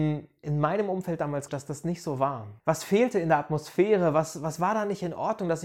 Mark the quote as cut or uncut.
cut